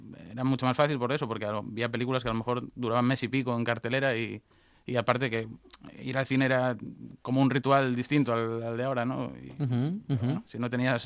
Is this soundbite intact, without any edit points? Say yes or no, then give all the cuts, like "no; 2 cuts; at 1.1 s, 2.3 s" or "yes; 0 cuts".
yes; 0 cuts